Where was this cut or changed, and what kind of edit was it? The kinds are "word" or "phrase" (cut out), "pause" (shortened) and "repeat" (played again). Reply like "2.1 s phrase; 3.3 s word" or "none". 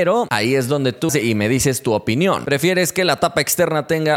1.1 s word